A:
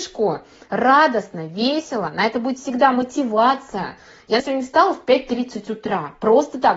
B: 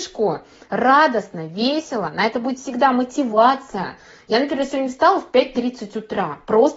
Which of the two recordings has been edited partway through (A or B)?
A